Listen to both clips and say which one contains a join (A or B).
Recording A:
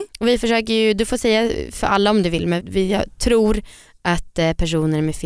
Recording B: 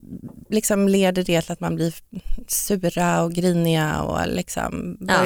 A